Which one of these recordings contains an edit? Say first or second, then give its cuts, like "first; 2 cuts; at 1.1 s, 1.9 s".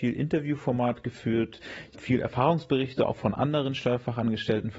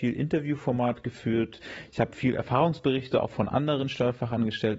first; 1 cut; at 1.9 s